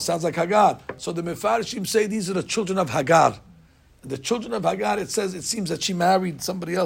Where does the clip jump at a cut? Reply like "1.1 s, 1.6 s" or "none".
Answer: none